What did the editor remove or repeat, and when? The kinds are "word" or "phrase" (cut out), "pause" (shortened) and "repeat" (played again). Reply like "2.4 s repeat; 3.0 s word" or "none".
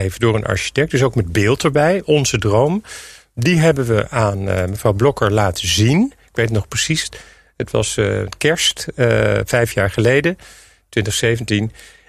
none